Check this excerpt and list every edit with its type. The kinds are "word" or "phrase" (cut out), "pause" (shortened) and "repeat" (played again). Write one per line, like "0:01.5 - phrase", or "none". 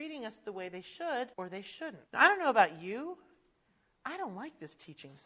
0:01.3 - pause
0:02.1 - pause